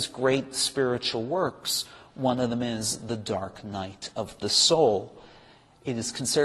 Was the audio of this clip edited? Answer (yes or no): no